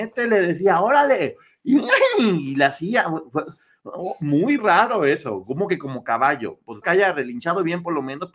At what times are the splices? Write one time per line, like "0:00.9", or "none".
0:04.6
0:06.8